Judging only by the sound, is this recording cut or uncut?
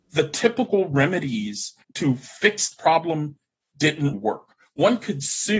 cut